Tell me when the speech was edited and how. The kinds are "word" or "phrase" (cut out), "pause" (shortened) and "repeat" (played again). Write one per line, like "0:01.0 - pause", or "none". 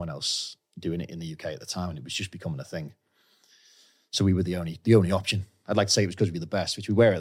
none